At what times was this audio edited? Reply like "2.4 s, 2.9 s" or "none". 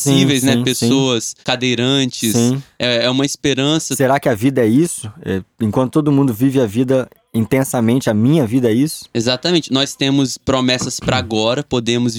1.4 s